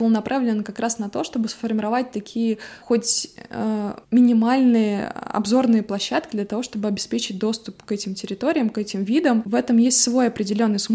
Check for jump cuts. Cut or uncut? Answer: cut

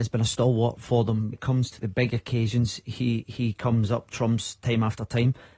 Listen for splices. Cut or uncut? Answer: cut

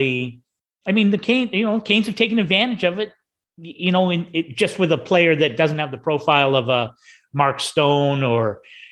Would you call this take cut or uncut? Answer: uncut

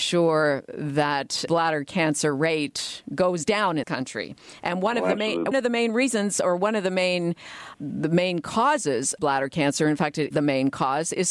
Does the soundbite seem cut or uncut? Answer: cut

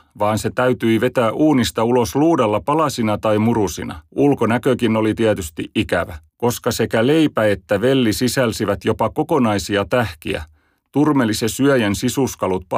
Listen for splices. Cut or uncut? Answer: cut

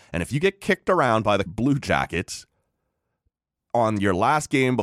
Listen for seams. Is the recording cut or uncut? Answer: cut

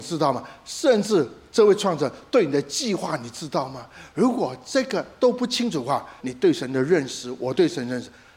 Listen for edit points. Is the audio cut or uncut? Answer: cut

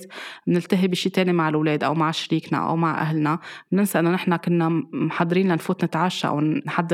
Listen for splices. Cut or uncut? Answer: uncut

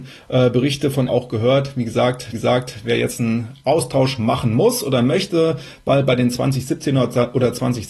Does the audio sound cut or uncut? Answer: cut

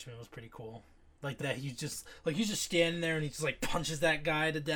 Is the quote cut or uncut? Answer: cut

